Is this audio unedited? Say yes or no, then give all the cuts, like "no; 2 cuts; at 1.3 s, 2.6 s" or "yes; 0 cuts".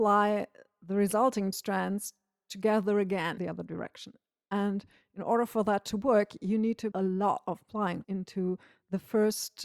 no; 4 cuts; at 1.5 s, 3.4 s, 6.9 s, 8.0 s